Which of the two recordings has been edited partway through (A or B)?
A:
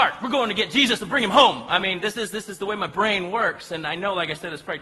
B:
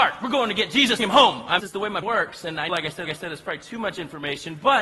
B